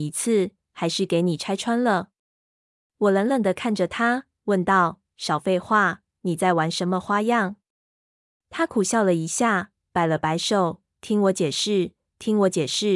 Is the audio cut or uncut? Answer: uncut